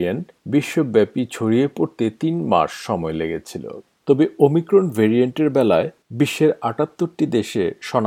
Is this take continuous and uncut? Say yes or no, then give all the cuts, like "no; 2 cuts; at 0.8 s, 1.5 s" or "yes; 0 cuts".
yes; 0 cuts